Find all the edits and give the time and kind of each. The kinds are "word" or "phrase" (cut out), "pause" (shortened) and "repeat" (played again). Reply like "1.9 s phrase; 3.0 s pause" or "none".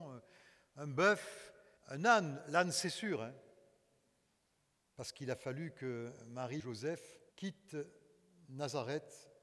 1.8 s pause; 6.6 s word; 7.3 s pause